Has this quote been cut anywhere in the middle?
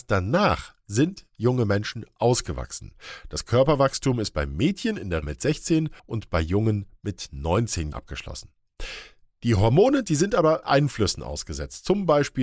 yes; 4 cuts; at 5.2 s, 6.0 s, 7.9 s, 10.6 s

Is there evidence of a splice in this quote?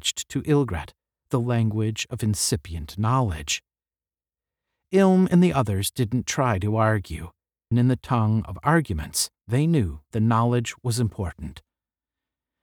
yes; 3 cuts; at 7.7 s, 9.4 s, 10.1 s

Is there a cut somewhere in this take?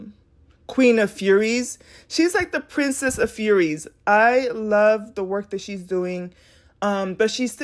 no; 0 cuts

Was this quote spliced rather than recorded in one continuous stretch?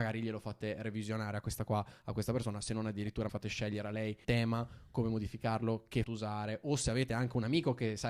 yes; 3 cuts; at 3.3 s, 4.2 s, 6.0 s

